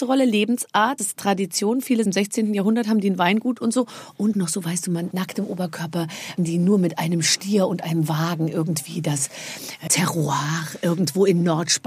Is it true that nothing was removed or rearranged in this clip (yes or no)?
no